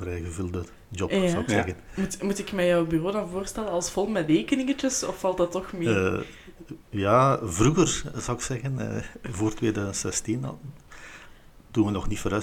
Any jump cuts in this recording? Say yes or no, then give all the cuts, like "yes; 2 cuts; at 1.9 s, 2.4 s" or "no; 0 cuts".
yes; 1 cut; at 6.8 s